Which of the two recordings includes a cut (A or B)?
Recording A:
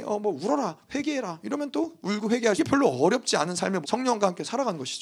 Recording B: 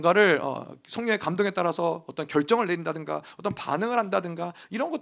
A